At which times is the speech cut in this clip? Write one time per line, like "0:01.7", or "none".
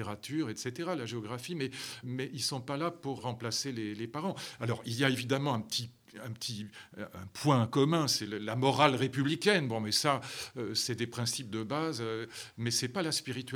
0:02.0
0:03.2